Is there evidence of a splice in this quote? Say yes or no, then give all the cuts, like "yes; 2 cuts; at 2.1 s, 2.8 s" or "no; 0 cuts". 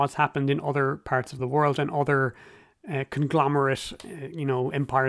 no; 0 cuts